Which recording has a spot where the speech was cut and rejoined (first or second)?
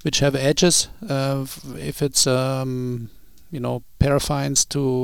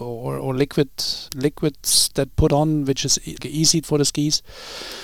second